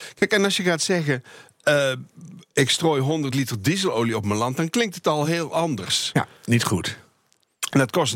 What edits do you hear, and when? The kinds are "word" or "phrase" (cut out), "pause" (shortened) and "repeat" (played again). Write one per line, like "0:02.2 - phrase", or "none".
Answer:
none

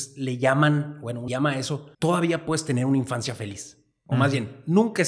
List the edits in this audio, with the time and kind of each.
0:01.3 - phrase
0:01.9 - pause

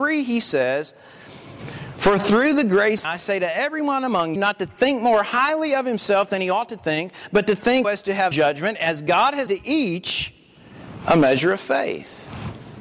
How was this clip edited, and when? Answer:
0:03.0 - phrase
0:04.4 - word
0:07.8 - word
0:08.3 - word
0:09.5 - word

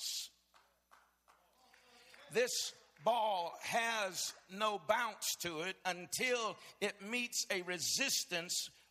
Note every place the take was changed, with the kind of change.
none

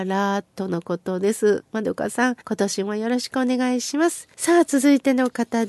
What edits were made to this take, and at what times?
0:02.4 - pause
0:04.3 - pause

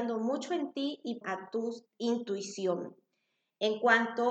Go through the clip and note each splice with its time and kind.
0:01.2 - phrase
0:01.9 - word

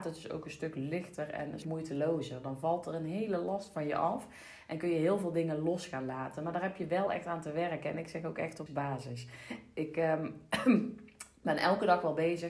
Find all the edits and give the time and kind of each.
0:01.6 - word
0:08.7 - word

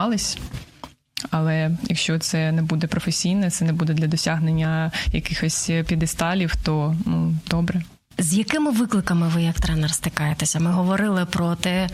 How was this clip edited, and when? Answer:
none

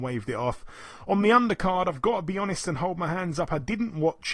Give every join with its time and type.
none

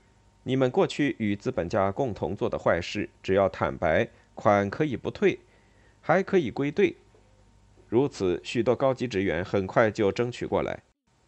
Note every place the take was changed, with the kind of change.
none

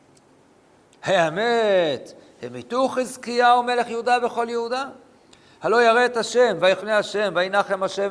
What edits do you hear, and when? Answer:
0:06.8 - word

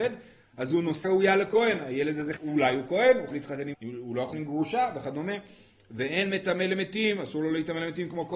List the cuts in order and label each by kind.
0:01.0 - word
0:02.4 - word
0:03.3 - word
0:03.7 - word
0:04.3 - word

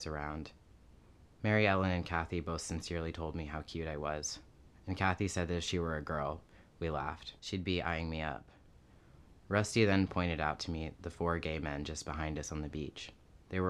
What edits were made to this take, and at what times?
0:07.4 - pause
0:09.4 - pause

